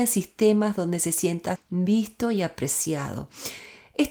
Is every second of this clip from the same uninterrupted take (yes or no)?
no